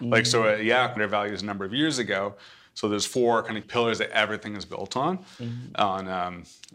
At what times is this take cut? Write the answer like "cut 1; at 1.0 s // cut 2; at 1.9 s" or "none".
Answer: cut 1; at 1.0 s // cut 2; at 3.6 s